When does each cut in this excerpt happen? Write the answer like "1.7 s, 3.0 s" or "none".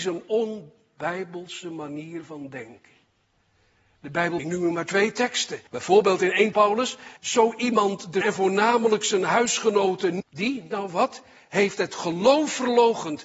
4.4 s, 5.7 s, 6.5 s, 7.2 s, 8.2 s, 10.2 s

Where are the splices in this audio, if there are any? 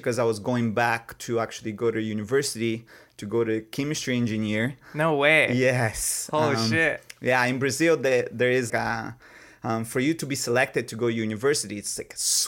8.7 s

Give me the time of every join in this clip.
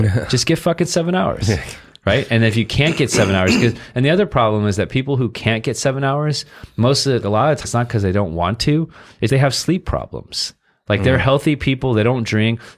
7.2 s, 7.6 s, 9.3 s

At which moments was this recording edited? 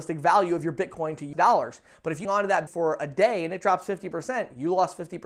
1.3 s, 2.2 s, 2.7 s

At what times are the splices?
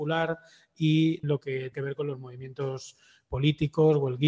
1.2 s, 1.7 s

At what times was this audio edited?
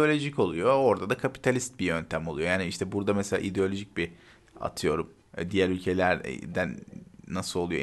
none

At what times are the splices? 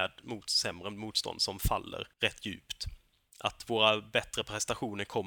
2.1 s

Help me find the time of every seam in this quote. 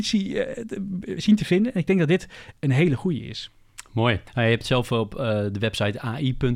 4.3 s

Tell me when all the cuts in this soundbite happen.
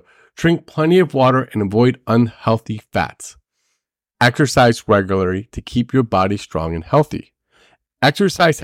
none

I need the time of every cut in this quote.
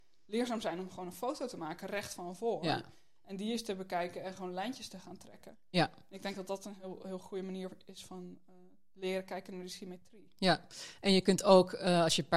none

